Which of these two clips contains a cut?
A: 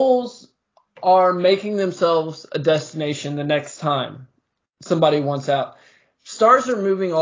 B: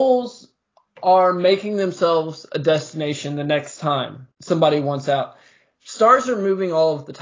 B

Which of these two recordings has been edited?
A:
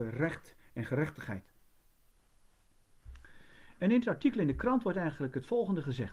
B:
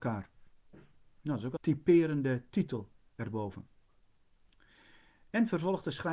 B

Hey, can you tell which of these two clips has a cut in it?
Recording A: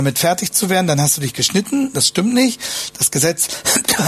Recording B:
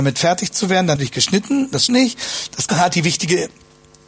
B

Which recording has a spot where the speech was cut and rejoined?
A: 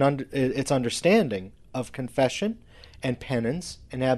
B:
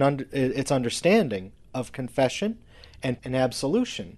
B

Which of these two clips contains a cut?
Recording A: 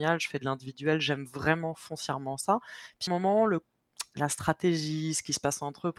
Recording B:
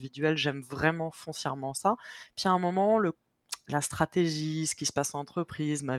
A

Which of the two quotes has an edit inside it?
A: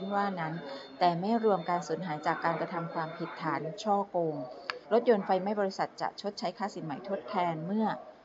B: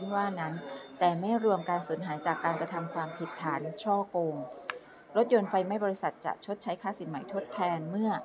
A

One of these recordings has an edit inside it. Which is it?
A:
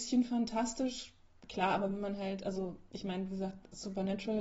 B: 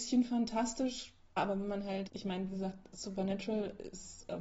B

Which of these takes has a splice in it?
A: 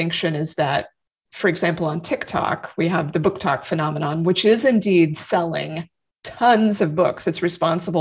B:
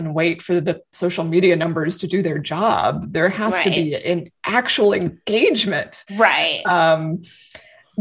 B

